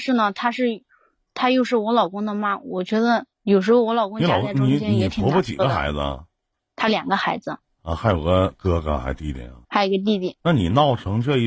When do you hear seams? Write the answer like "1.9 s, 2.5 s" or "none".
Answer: 3.3 s, 6.6 s, 7.7 s, 9.6 s, 10.4 s